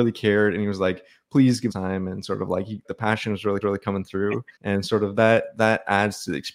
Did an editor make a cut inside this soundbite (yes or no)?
yes